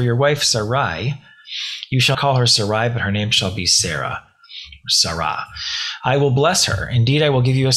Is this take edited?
yes; 1 cut; at 2.1 s

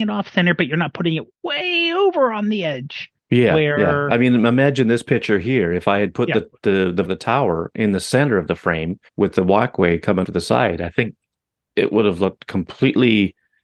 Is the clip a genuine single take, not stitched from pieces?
no; 4 cuts; at 3.2 s, 7.0 s, 9.1 s, 10.2 s

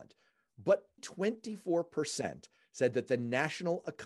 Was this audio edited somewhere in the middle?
yes; 1 cut; at 1.0 s

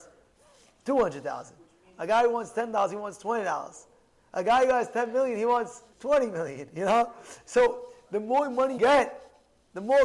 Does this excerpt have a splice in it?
yes; 2 cuts; at 5.9 s, 8.8 s

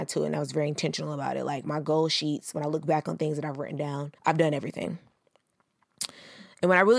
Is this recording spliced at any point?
yes; 1 cut; at 4.2 s

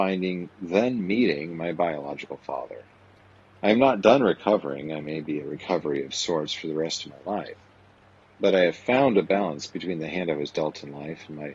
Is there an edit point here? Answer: no; 0 cuts

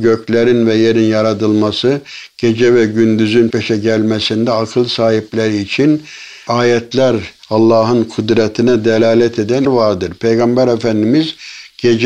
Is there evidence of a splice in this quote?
yes; 3 cuts; at 3.5 s, 6.5 s, 9.7 s

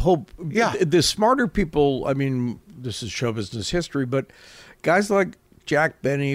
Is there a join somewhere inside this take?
no; 0 cuts

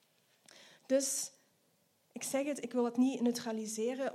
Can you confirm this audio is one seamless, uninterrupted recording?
yes; 0 cuts

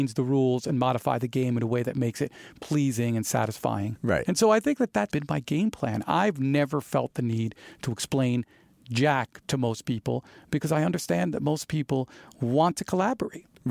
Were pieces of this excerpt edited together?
yes; 1 cut; at 5.1 s

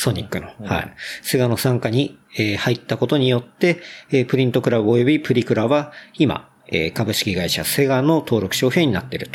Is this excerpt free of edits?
no; 1 cut; at 2.2 s

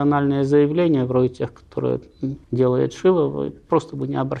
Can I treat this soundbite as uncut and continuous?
no; 1 cut; at 2.4 s

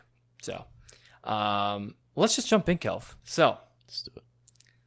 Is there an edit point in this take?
yes; 2 cuts; at 2.0 s, 3.2 s

